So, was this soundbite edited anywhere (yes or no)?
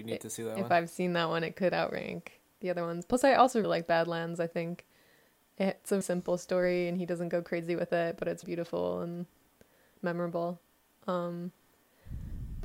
yes